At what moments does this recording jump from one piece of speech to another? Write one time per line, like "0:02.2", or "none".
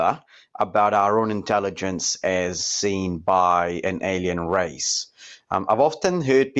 none